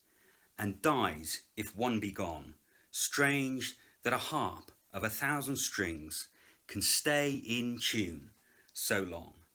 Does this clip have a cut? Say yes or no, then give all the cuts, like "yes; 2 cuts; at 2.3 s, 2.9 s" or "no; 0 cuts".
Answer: no; 0 cuts